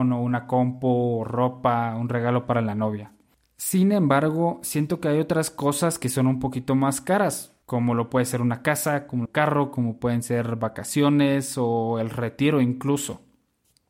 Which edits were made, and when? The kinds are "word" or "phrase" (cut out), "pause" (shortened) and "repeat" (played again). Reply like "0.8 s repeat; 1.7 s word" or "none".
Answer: 7.6 s pause; 9.3 s phrase